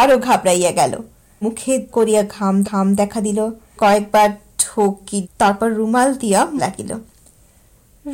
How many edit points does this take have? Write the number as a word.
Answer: six